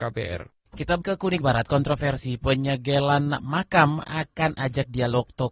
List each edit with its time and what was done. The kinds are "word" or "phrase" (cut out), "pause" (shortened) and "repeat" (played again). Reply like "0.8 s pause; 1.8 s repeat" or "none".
1.0 s word; 1.4 s word; 4.0 s phrase

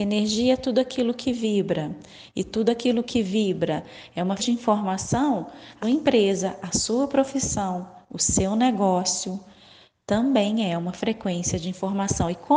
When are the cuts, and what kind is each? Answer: 4.4 s word; 5.8 s word

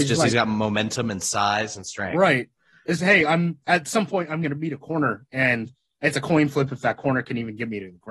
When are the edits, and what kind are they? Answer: 3.0 s word

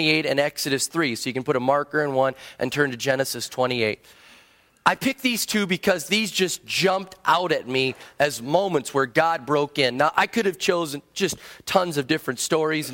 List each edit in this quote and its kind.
none

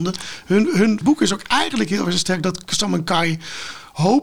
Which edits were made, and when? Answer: 1.0 s phrase

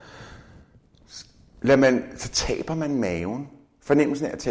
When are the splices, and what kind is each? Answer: none

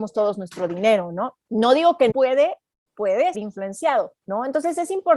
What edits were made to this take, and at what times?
1.4 s pause; 2.1 s phrase; 3.3 s word; 4.2 s pause

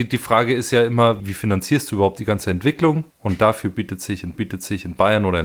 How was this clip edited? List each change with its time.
1.2 s word; 3.1 s pause; 4.3 s repeat

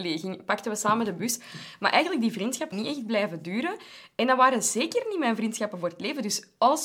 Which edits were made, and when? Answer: 2.7 s word

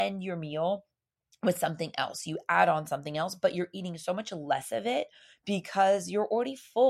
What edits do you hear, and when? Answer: none

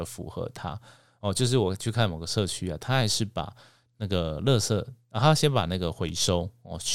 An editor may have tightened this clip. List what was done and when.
none

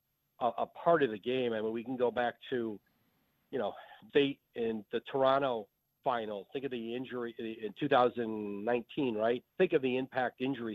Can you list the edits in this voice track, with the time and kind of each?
4.1 s word; 9.5 s pause

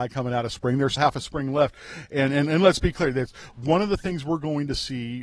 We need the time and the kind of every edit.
1.0 s word

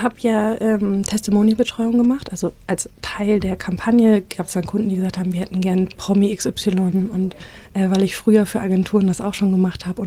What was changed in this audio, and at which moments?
none

